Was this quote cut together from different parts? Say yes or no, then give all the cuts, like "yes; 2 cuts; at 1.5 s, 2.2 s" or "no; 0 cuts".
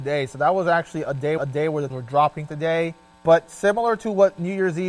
yes; 4 cuts; at 1.4 s, 1.9 s, 2.5 s, 3.1 s